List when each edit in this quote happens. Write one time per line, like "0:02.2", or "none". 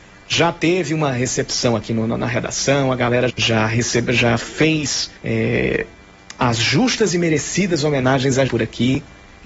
0:03.3
0:05.2
0:08.5